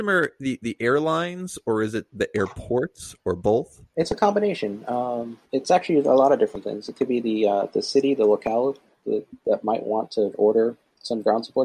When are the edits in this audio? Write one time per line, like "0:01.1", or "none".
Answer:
0:05.5